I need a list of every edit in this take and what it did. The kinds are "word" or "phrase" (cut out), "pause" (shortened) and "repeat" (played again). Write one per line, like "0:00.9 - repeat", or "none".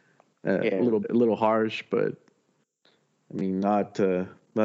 0:01.0 - word